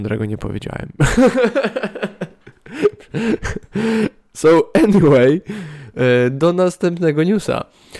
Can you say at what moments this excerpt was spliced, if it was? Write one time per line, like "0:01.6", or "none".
none